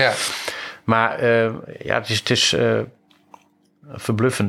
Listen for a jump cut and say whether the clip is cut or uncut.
uncut